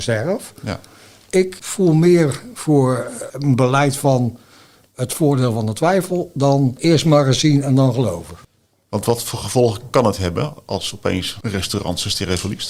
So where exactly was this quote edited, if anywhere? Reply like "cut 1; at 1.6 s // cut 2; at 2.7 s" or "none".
none

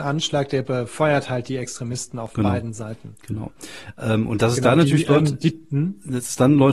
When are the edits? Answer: none

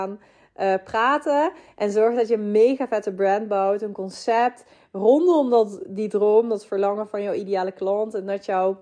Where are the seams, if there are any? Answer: none

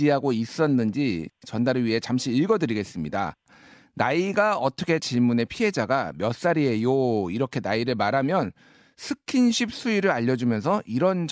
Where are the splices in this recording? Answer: cut 1; at 5.0 s

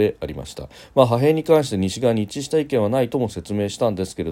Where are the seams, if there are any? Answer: none

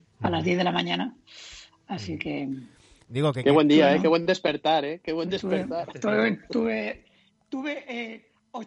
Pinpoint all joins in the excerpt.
none

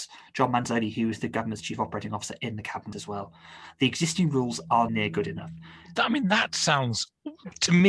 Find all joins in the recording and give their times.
cut 1; at 2.9 s // cut 2; at 4.9 s

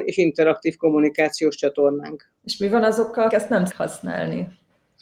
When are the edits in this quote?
cut 1; at 2.4 s // cut 2; at 3.3 s // cut 3; at 3.7 s

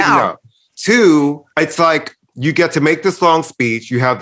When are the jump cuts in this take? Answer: cut 1; at 1.5 s // cut 2; at 2.2 s

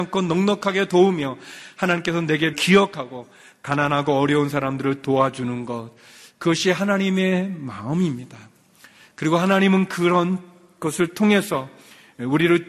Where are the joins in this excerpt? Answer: cut 1; at 2.5 s

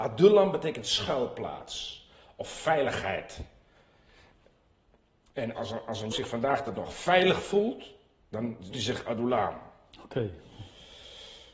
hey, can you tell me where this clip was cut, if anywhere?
cut 1; at 5.6 s // cut 2; at 6.1 s // cut 3; at 6.7 s // cut 4; at 8.7 s

